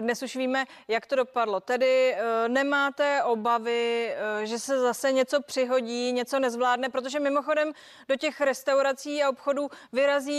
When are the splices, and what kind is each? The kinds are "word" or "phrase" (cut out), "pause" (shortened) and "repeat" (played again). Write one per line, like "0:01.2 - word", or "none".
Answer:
none